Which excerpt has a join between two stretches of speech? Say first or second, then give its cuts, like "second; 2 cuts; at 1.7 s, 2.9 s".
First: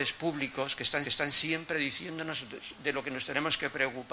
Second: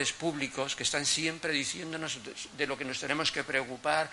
first; 1 cut; at 1.0 s